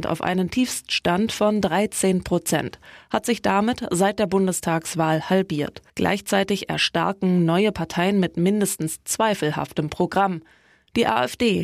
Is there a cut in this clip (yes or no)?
yes